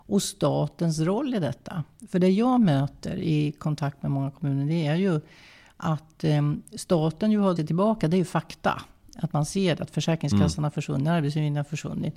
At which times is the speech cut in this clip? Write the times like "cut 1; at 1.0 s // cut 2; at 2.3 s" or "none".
cut 1; at 7.6 s